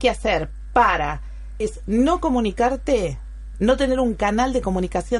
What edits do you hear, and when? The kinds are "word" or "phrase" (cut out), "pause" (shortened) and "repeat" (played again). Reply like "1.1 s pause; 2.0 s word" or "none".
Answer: 1.6 s phrase